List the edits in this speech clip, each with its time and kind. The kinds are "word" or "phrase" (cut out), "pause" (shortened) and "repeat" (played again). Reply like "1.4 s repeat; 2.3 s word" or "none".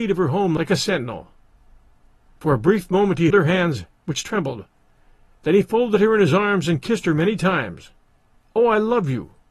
3.3 s word